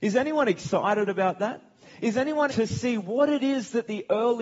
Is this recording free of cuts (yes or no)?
no